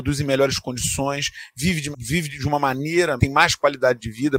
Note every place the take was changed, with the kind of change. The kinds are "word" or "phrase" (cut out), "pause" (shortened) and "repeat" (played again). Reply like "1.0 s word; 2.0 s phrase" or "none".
1.9 s word; 3.2 s word